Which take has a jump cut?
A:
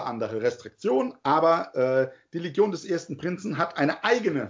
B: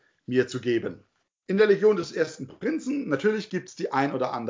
B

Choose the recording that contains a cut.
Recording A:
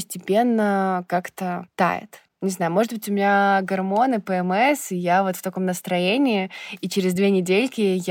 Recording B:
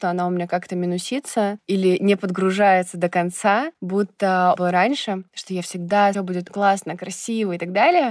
B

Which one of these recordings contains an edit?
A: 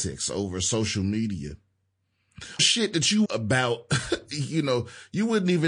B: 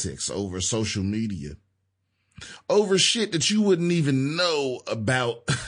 A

